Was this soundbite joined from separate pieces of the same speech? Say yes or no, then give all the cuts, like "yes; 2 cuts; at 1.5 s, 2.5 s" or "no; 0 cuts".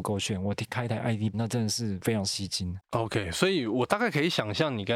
yes; 1 cut; at 1.3 s